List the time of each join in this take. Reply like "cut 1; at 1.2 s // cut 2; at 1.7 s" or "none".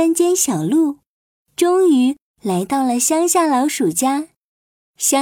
none